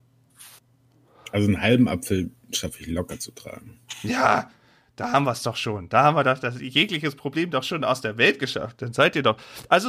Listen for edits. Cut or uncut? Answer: uncut